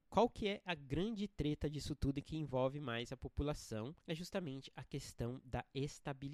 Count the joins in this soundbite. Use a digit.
1